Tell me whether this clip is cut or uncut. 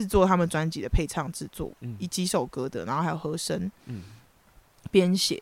uncut